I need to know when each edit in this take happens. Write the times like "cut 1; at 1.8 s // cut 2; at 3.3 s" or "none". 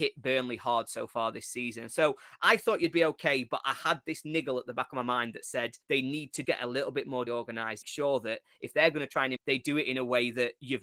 cut 1; at 5.8 s // cut 2; at 6.4 s // cut 3; at 7.3 s // cut 4; at 7.8 s // cut 5; at 9.4 s